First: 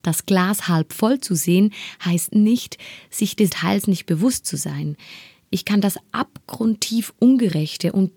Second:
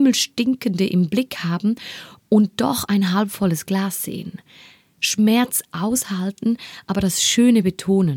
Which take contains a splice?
first; 1 cut; at 3.5 s

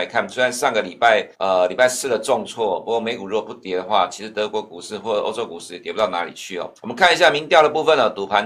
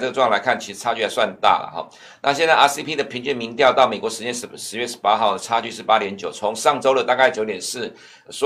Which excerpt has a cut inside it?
first; 2 cuts; at 1.3 s, 6.8 s

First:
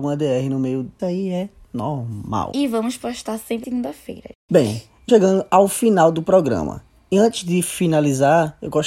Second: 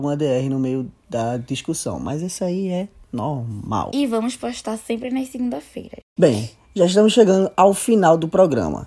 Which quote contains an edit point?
first; 3 cuts; at 1.0 s, 3.6 s, 5.1 s

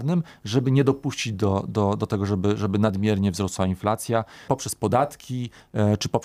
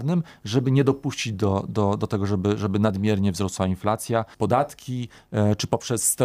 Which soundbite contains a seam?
second; 1 cut; at 4.3 s

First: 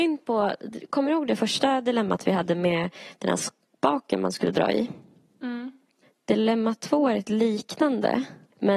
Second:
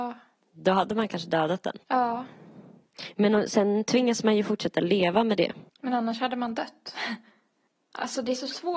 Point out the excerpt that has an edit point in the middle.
second; 2 cuts; at 1.8 s, 5.7 s

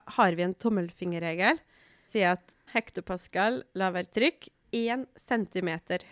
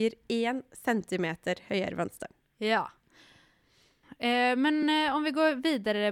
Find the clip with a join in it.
first; 3 cuts; at 2.1 s, 2.7 s, 4.6 s

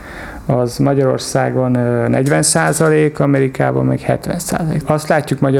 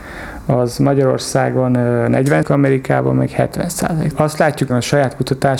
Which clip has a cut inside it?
second; 2 cuts; at 2.4 s, 4.7 s

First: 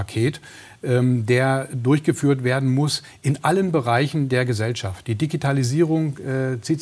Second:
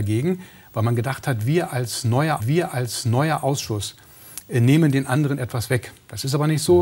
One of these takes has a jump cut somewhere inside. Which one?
second; 1 cut; at 2.4 s

